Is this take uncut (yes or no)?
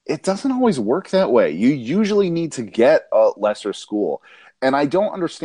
yes